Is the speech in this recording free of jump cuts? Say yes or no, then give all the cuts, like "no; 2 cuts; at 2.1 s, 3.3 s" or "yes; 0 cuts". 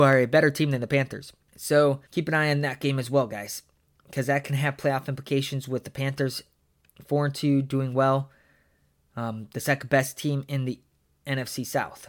no; 1 cut; at 2.1 s